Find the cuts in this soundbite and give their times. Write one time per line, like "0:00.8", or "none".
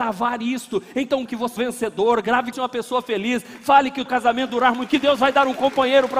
0:01.3
0:01.6
0:02.5
0:04.1
0:04.5
0:04.9